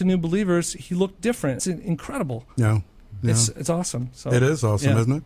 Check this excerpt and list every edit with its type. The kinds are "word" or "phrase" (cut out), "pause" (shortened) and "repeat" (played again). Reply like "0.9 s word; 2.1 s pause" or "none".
1.6 s phrase